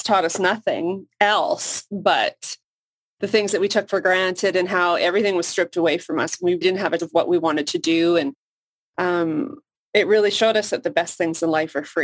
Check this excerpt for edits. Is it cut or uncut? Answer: cut